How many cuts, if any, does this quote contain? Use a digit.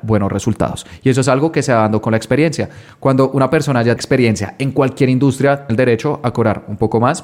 2